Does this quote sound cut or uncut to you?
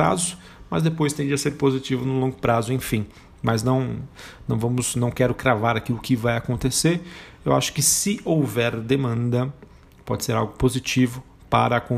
uncut